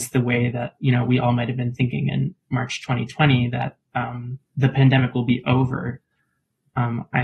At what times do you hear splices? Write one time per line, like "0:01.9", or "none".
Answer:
0:04.5

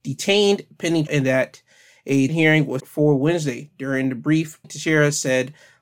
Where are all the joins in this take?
0:01.1
0:02.3
0:02.8
0:04.6

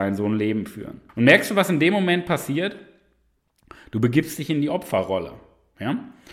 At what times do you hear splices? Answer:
0:01.1

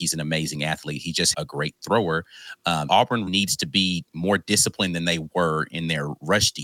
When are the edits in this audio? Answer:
0:01.3
0:02.9
0:03.3

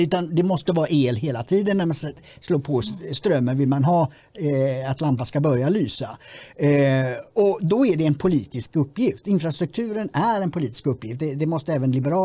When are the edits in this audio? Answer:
none

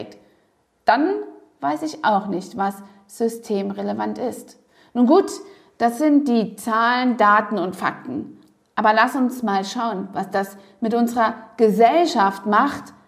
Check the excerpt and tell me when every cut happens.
none

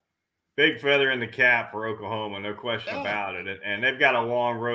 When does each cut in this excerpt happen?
none

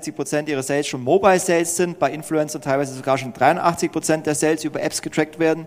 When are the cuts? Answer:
none

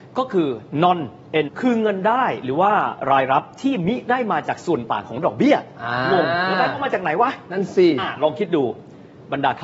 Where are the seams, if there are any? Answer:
0:01.5

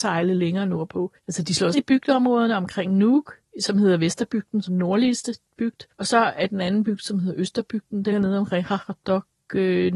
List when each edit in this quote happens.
0:01.2
0:01.7
0:03.4
0:04.7
0:05.9
0:08.1

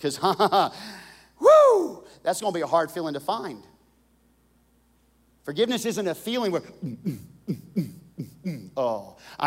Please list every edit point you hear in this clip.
none

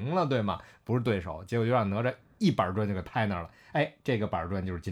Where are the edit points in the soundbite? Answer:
none

